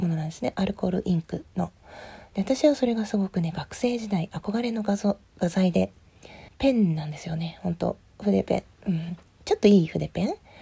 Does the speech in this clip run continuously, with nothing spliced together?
no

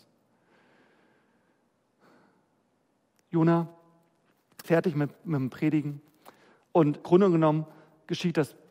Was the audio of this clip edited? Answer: yes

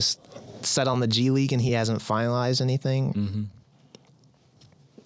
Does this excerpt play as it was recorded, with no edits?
yes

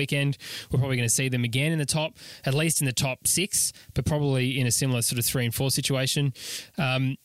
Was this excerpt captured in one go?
yes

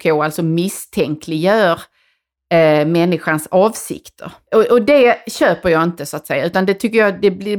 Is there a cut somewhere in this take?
no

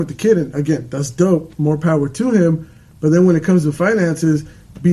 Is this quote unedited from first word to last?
yes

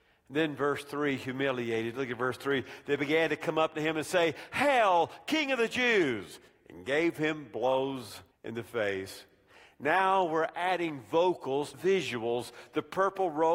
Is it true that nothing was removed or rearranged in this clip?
no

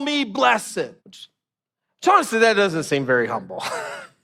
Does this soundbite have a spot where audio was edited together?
yes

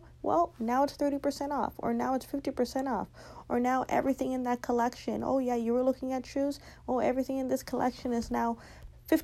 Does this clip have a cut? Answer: no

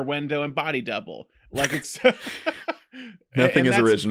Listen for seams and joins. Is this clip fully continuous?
no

